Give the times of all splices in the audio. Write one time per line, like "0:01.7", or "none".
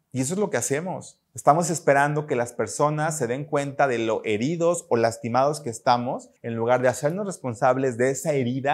0:01.2
0:06.4